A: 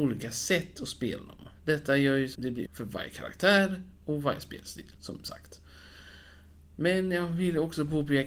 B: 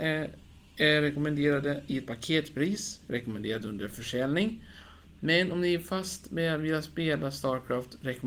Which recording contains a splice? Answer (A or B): A